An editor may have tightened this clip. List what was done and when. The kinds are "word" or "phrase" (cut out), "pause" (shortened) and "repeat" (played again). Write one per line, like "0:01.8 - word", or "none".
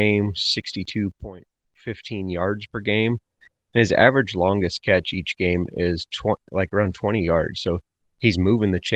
none